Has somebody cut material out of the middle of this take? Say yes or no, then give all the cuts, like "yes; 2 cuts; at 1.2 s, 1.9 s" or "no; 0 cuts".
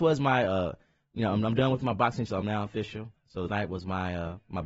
yes; 2 cuts; at 2.3 s, 3.5 s